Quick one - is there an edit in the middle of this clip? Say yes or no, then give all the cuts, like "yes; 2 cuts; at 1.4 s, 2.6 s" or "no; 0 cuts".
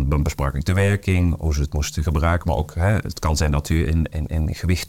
no; 0 cuts